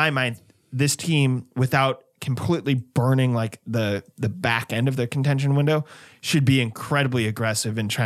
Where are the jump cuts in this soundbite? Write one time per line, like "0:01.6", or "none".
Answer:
none